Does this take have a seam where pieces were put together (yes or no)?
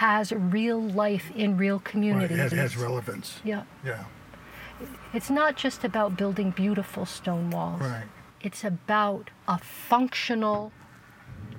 yes